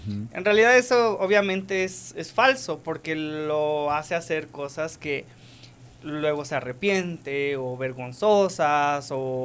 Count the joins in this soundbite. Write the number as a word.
zero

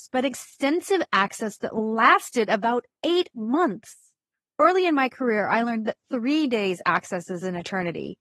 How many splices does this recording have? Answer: zero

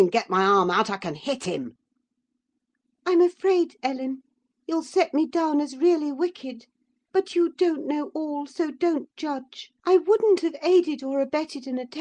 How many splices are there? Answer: one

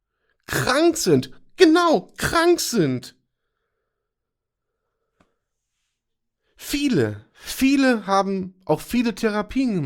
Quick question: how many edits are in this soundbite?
zero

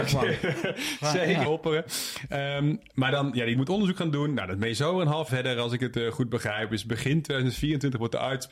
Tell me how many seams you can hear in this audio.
three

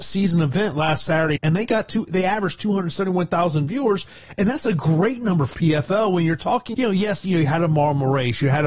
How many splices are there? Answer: three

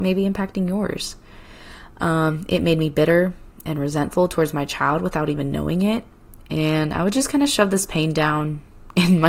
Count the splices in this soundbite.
zero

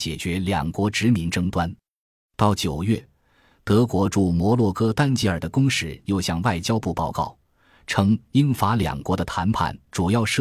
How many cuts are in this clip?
zero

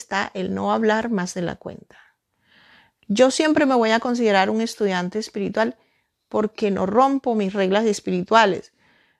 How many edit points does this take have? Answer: zero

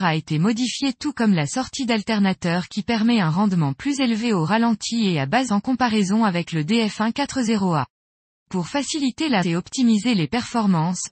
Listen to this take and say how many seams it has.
two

